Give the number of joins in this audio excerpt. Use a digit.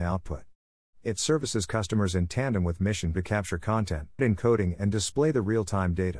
2